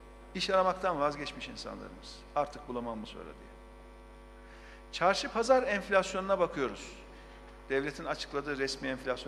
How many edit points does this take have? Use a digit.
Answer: 1